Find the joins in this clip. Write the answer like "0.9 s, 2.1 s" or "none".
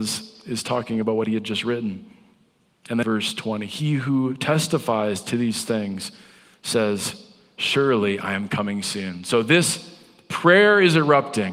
3.0 s